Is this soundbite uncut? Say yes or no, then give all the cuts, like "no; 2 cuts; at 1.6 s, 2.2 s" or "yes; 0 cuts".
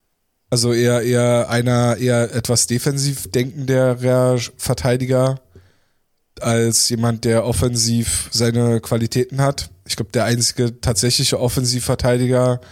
yes; 0 cuts